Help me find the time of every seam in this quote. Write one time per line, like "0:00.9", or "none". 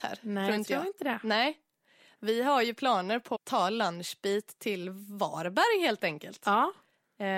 0:03.3